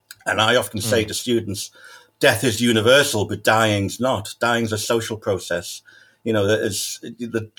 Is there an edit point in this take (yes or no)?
no